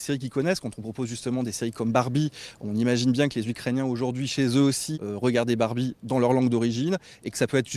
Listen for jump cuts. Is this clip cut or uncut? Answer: cut